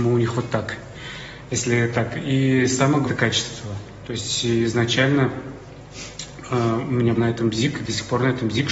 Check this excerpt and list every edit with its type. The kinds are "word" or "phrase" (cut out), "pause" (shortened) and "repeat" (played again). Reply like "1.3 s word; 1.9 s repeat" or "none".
3.0 s word; 7.2 s word